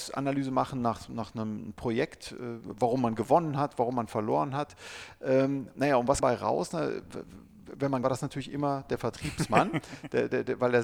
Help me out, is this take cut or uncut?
cut